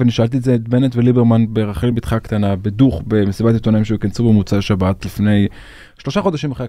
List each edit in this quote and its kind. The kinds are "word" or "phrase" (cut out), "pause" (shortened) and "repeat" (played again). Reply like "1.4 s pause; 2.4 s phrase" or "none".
none